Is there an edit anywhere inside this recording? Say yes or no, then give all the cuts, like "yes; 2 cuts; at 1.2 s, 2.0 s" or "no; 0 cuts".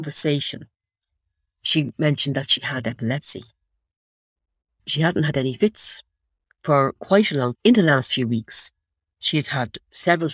yes; 1 cut; at 7.5 s